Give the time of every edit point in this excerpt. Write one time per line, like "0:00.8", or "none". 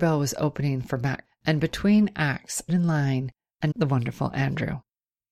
0:01.2
0:02.7
0:03.7

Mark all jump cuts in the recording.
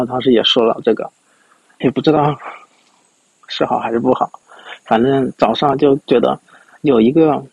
0:01.8

